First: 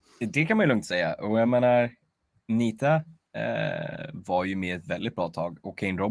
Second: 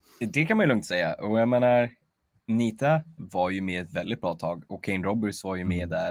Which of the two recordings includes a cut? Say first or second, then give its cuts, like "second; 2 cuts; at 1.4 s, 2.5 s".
second; 1 cut; at 3.2 s